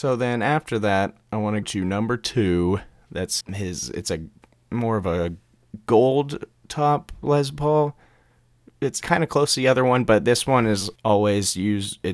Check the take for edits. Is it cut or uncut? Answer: cut